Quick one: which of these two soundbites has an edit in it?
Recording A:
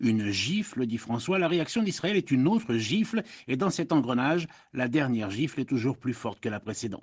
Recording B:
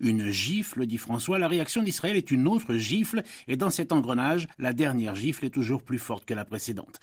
B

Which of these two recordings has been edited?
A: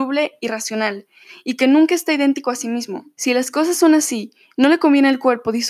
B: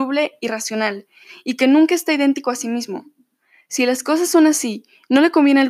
A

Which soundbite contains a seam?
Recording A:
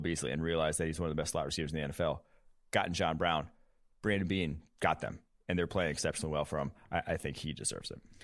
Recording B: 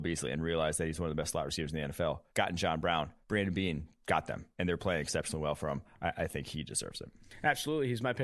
B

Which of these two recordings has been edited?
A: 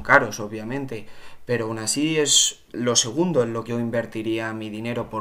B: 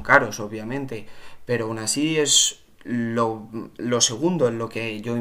A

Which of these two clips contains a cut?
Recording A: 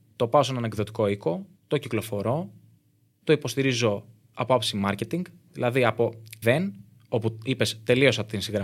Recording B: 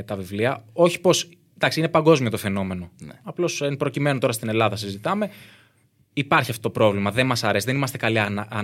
A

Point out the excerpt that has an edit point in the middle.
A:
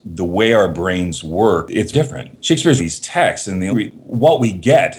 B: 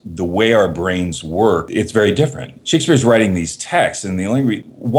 A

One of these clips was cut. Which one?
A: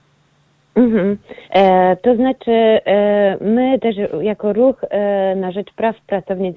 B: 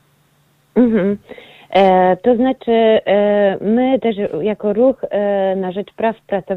A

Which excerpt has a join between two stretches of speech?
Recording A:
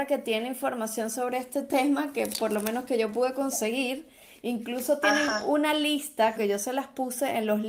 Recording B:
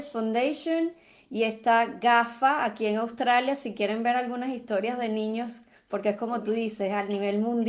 A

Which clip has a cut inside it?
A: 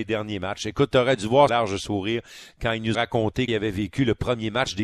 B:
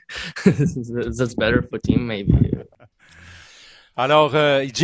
A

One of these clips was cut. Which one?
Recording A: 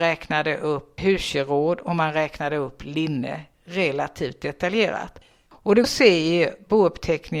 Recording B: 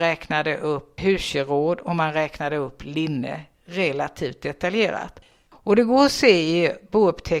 A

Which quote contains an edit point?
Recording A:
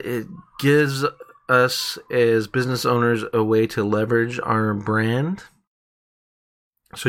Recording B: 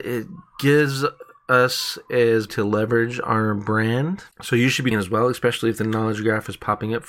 B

